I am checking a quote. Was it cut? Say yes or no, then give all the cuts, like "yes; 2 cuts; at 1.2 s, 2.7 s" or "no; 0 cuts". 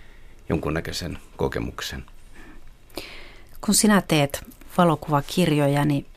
no; 0 cuts